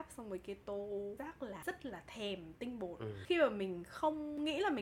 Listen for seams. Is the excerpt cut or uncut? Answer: cut